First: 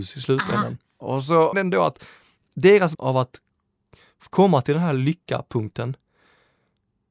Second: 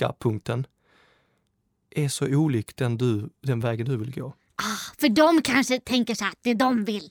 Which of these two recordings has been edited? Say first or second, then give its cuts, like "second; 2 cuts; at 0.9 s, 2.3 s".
first; 2 cuts; at 1.5 s, 2.9 s